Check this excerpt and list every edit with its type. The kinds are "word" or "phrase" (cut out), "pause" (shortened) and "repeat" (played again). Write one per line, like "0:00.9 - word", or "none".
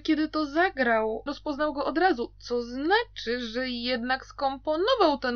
0:01.3 - word

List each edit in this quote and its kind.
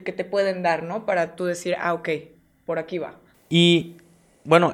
0:03.3 - pause

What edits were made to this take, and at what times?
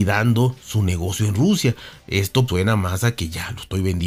0:02.5 - word

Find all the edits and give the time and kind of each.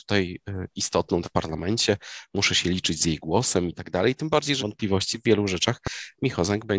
0:01.2 - phrase
0:04.6 - phrase
0:05.1 - word

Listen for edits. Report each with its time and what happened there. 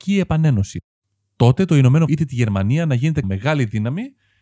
0:02.1 - word
0:03.2 - word

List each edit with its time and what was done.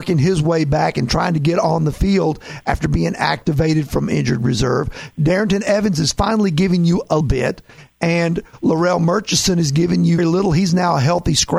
0:07.2 - word
0:10.2 - word

